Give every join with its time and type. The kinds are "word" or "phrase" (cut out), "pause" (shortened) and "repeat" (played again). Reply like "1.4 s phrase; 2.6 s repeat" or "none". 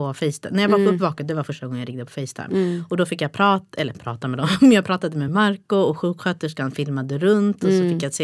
none

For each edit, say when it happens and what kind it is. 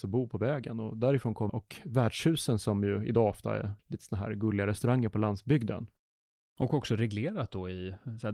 1.5 s phrase; 3.8 s pause

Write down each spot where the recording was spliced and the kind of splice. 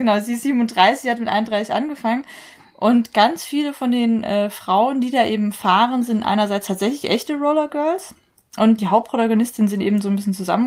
8.8 s word

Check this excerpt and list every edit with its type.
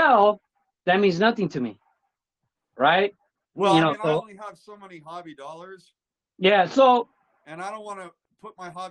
none

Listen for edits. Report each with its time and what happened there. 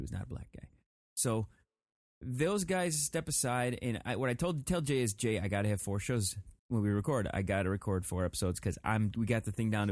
6.6 s pause

